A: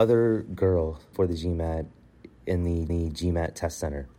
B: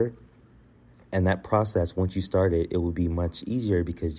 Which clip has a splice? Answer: A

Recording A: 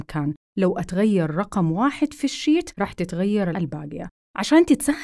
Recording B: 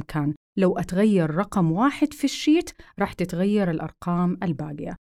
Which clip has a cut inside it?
A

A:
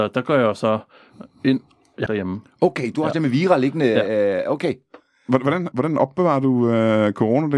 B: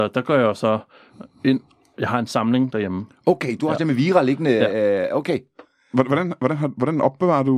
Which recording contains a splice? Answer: A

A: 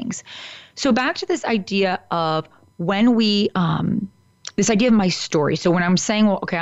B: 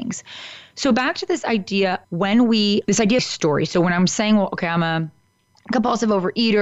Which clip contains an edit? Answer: B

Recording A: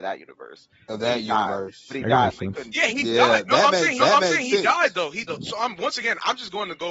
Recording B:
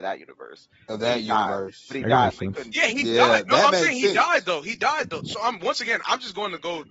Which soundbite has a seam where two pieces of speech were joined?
A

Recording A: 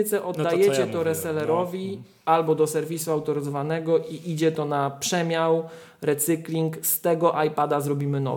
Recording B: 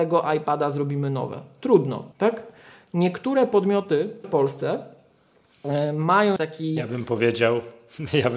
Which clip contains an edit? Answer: B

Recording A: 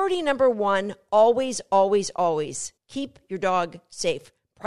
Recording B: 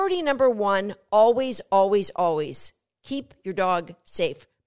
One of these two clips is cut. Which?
A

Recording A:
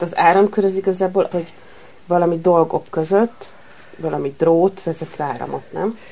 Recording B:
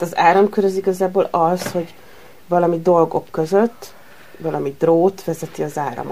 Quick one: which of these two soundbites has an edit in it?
A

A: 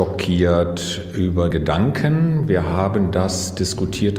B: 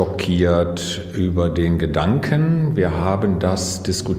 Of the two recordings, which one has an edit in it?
A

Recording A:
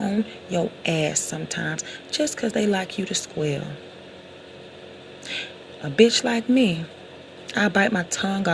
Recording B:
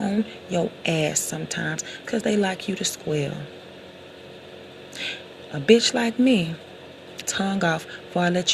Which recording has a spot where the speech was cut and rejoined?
B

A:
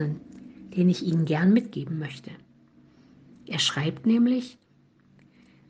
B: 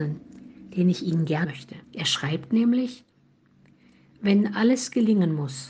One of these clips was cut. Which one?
B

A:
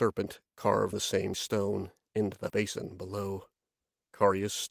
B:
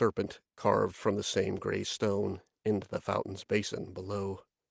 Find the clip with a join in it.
A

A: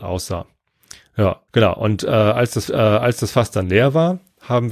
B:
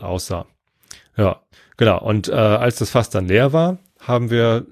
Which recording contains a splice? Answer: A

